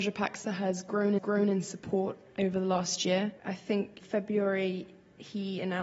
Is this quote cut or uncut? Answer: cut